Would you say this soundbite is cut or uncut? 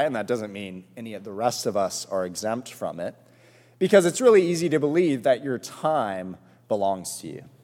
uncut